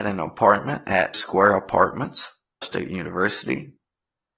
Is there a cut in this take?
yes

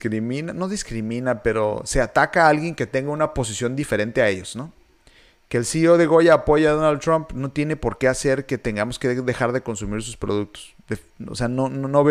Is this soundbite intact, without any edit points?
yes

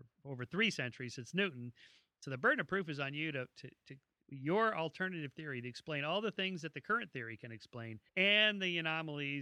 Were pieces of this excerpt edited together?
yes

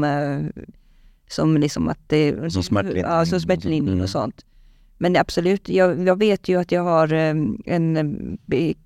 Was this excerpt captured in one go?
yes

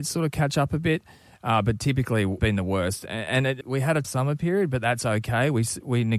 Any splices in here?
yes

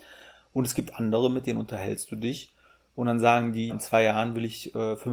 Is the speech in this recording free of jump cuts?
no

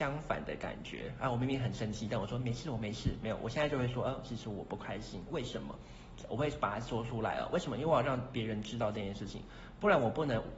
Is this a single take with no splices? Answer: yes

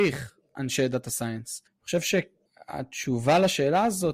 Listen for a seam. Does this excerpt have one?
yes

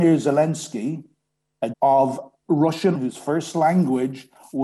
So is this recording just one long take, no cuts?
no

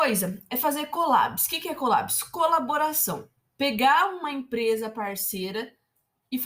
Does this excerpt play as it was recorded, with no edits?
yes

